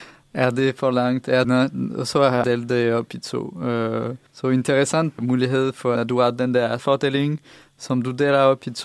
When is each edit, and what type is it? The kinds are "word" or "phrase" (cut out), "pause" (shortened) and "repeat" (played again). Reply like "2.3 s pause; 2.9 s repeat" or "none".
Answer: 1.4 s word; 2.4 s word; 4.3 s pause; 5.2 s word; 6.0 s word; 6.8 s word

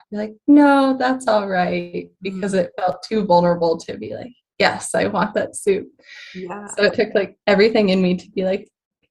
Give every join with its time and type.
none

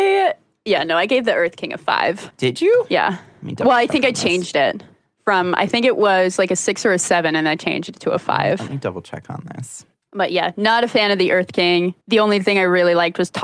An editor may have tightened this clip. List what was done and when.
12.0 s pause

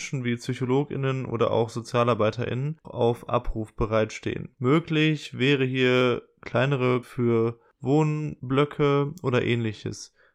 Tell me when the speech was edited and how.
2.8 s phrase; 7.0 s word

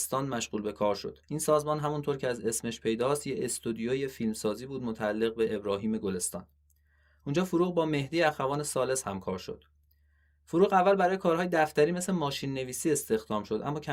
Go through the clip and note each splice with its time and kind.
1.2 s pause

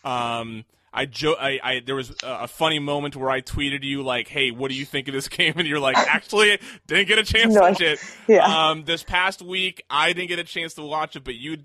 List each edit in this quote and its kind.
7.7 s word

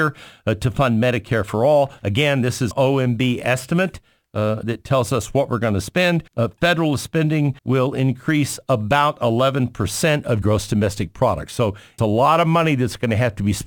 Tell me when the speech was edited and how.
2.7 s word; 4.6 s word; 6.3 s pause; 7.6 s pause; 10.4 s word; 12.0 s phrase

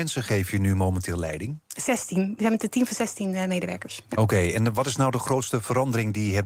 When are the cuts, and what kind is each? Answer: none

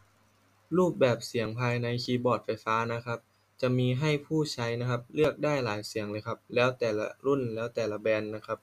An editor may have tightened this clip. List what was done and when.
none

